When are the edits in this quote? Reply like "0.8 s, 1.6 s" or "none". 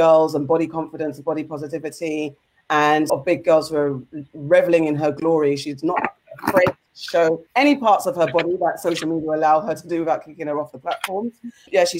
3.1 s, 7.5 s